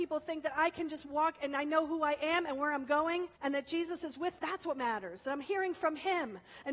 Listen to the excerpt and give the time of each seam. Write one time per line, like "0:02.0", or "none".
0:03.3
0:04.4